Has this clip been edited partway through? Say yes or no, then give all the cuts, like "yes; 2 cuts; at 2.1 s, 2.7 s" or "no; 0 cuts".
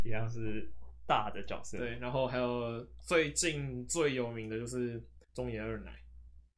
yes; 1 cut; at 5.2 s